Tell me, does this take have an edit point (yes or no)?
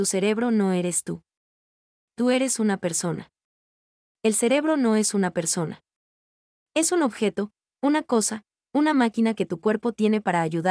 no